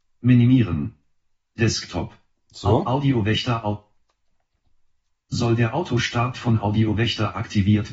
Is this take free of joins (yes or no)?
yes